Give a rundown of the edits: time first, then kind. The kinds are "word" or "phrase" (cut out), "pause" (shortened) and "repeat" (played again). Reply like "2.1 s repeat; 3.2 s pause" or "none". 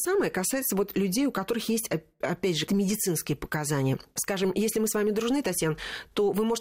2.7 s word